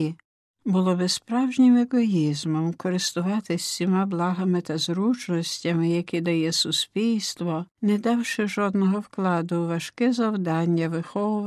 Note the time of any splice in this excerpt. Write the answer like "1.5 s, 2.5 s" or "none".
7.7 s